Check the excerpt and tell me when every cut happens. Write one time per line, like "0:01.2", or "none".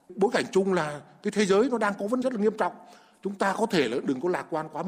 0:02.2